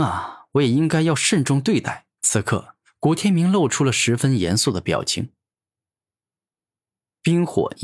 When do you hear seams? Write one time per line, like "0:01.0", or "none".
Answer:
0:02.1